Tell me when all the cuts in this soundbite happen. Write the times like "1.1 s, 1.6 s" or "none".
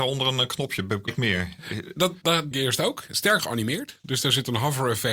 1.1 s, 2.2 s, 2.5 s, 3.4 s

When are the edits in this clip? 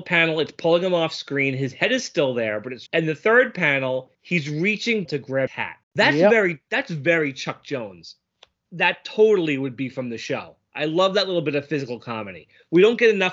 2.9 s, 4.1 s, 5.0 s, 5.5 s, 5.8 s, 8.6 s

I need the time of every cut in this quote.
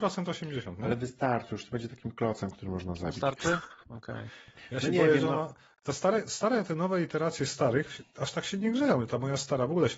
none

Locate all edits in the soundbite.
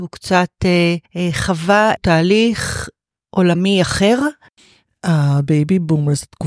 1.0 s, 2.0 s

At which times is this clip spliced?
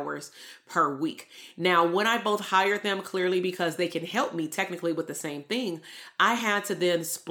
none

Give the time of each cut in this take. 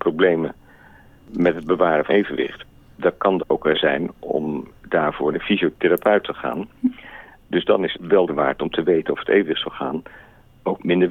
2.1 s, 3.4 s, 3.7 s, 5.3 s, 7.9 s, 8.3 s

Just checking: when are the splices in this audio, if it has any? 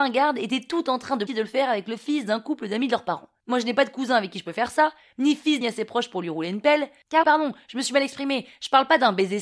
1.3 s, 5.6 s, 7.2 s

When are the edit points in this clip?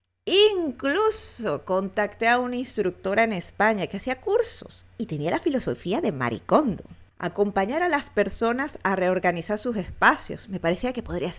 7.1 s

